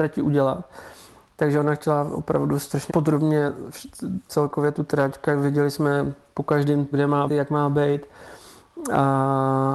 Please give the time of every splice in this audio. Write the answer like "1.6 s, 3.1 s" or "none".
2.9 s, 4.3 s, 6.9 s, 7.3 s